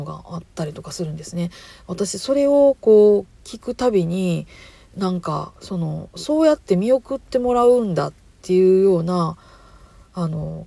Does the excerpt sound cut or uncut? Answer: uncut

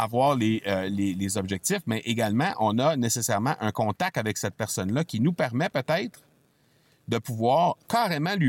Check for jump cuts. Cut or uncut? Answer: uncut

